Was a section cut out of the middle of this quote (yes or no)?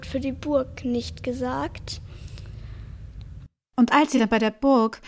no